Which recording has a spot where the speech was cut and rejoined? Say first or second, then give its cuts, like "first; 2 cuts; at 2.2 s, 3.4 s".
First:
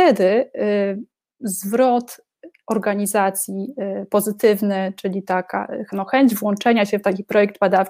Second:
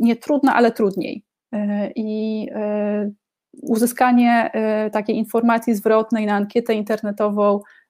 first; 1 cut; at 1.1 s